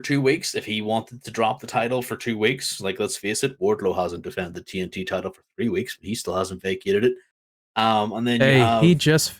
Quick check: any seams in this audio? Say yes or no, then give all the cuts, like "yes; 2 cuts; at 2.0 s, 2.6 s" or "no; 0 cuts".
no; 0 cuts